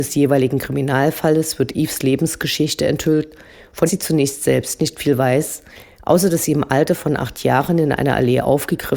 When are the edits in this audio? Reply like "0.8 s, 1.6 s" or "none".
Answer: 3.9 s